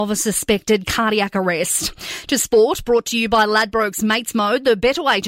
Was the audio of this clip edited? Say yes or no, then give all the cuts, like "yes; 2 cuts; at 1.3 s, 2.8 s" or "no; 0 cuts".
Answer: no; 0 cuts